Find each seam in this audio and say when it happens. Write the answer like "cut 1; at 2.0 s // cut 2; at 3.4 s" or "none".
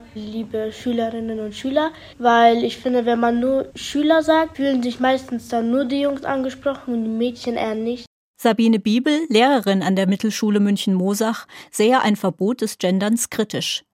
none

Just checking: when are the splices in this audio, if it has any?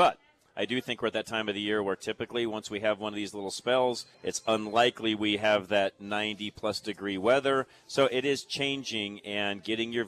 cut 1; at 4.1 s

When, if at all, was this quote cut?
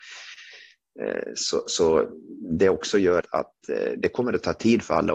cut 1; at 3.2 s

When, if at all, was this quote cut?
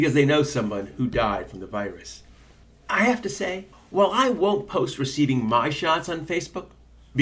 cut 1; at 2.6 s // cut 2; at 3.7 s

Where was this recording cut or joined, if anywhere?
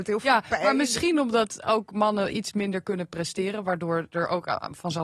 none

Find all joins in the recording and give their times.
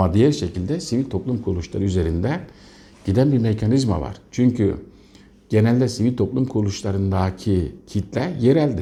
none

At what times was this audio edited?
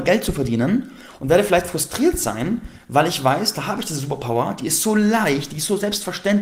none

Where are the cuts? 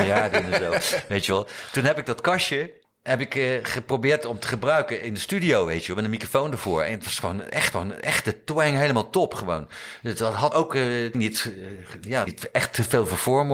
cut 1; at 2.8 s // cut 2; at 7.7 s // cut 3; at 10.5 s // cut 4; at 11.1 s // cut 5; at 12.3 s

